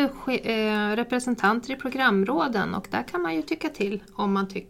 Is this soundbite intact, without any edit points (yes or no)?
yes